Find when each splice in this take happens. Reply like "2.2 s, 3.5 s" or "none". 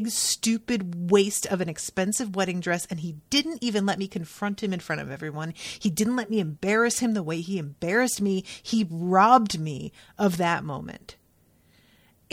none